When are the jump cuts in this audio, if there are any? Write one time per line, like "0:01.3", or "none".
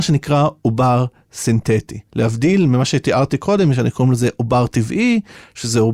0:02.1